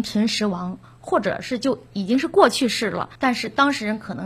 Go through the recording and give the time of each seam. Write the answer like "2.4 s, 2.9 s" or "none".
3.2 s